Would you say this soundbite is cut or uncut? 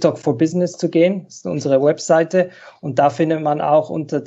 uncut